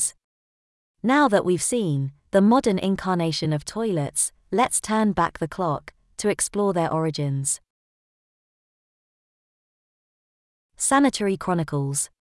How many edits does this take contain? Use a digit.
0